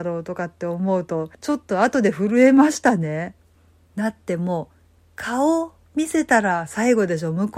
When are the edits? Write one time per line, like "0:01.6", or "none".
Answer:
0:01.3